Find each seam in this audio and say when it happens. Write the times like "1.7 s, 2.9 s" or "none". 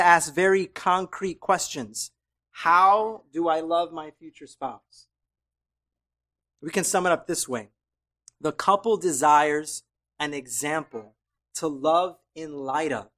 11.4 s